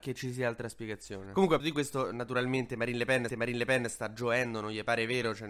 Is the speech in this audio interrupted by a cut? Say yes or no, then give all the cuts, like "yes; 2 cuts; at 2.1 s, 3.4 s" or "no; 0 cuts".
yes; 2 cuts; at 1.6 s, 3.3 s